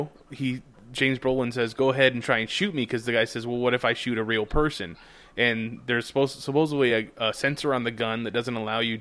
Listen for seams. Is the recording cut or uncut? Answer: uncut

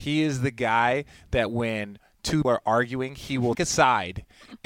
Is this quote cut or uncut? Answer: cut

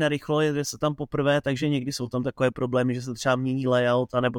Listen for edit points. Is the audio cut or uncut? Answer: uncut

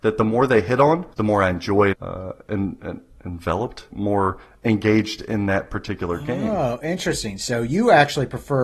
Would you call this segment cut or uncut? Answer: cut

